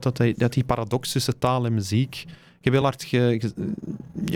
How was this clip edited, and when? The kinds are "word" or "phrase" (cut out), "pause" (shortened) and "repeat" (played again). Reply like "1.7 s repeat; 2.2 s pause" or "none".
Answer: none